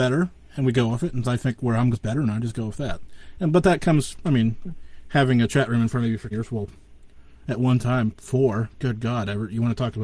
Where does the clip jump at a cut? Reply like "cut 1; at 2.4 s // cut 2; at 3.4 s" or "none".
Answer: cut 1; at 1.2 s // cut 2; at 1.9 s // cut 3; at 6.3 s